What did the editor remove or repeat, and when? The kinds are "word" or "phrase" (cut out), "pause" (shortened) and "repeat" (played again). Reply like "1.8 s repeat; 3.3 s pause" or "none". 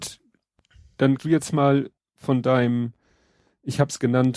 1.2 s word; 2.0 s pause